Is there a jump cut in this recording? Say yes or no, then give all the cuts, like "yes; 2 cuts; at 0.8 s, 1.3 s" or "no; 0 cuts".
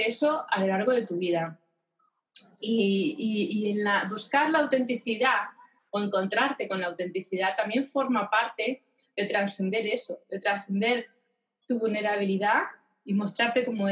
no; 0 cuts